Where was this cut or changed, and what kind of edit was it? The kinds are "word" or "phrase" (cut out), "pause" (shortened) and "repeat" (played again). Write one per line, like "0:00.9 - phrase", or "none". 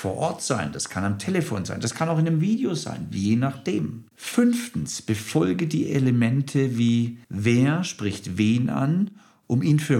0:04.1 - pause
0:07.2 - pause